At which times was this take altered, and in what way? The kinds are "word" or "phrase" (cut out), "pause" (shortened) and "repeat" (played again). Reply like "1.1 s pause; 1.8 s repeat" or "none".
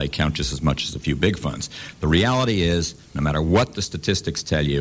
none